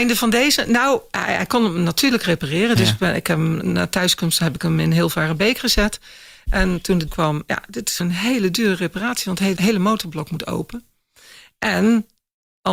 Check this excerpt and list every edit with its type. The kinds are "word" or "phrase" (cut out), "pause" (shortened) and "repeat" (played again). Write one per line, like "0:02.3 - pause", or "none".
0:03.6 - word
0:07.1 - word
0:08.0 - word
0:09.6 - word